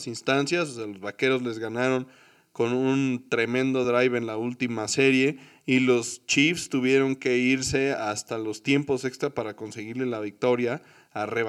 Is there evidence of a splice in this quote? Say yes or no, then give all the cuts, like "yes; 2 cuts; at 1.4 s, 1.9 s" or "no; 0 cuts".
no; 0 cuts